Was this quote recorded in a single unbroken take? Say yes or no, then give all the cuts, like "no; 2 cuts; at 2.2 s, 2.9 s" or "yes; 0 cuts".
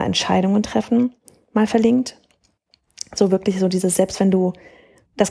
yes; 0 cuts